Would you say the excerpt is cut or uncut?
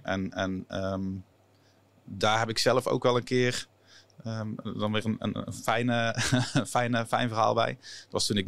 uncut